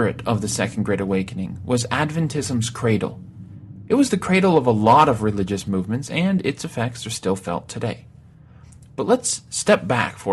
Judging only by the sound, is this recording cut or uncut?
uncut